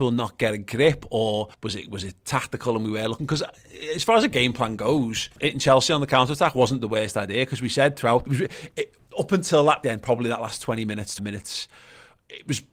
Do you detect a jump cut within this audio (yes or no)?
yes